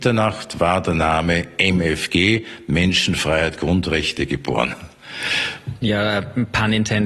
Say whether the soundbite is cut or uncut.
uncut